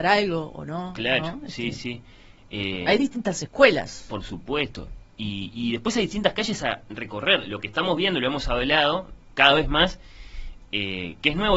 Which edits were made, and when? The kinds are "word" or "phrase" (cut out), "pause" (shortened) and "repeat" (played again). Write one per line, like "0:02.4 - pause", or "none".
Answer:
none